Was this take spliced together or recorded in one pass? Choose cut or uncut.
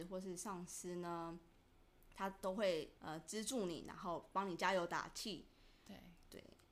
cut